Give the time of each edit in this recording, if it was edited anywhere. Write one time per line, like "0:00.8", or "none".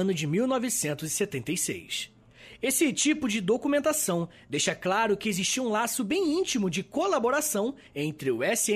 none